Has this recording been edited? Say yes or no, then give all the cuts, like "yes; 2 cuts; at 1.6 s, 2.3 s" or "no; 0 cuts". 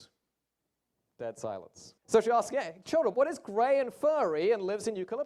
yes; 2 cuts; at 2.0 s, 3.1 s